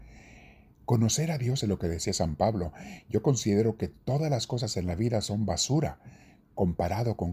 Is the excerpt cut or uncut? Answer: cut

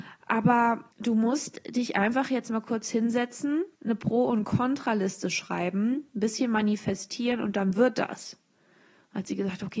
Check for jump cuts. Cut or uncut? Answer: cut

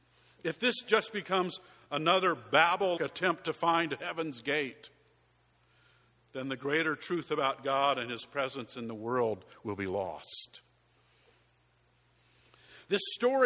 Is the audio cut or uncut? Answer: cut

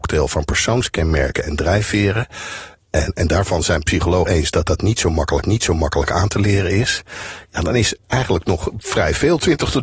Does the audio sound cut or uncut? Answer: cut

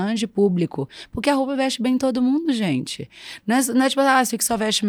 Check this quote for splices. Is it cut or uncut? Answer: uncut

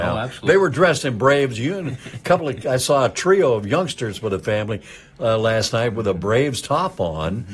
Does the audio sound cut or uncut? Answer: uncut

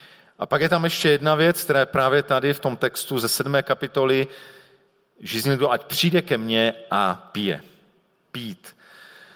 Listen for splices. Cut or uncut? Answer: uncut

